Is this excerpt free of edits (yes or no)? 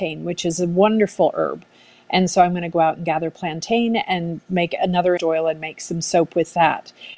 no